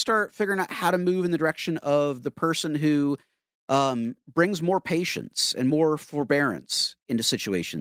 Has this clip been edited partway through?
no; 0 cuts

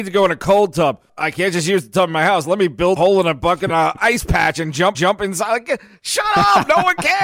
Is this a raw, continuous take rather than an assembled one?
no; 4 cuts; at 1.1 s, 3.0 s, 3.7 s, 4.9 s

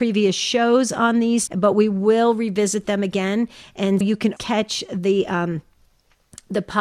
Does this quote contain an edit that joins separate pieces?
yes; 3 cuts; at 1.5 s, 4.0 s, 4.4 s

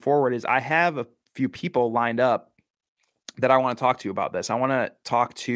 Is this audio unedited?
yes; 0 cuts

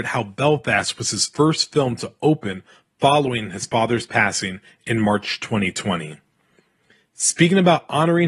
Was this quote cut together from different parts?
no; 0 cuts

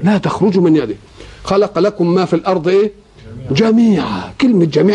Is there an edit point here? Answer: no; 0 cuts

